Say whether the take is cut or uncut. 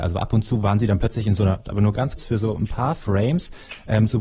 cut